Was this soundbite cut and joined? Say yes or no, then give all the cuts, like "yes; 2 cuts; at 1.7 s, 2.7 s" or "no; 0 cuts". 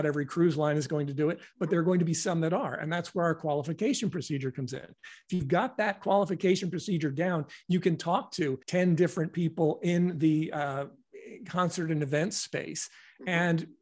yes; 1 cut; at 8.6 s